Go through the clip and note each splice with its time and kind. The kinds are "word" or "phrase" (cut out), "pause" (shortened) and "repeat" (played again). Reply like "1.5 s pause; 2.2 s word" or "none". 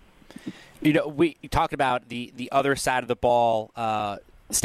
none